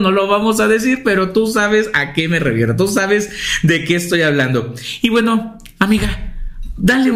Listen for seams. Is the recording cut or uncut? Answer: uncut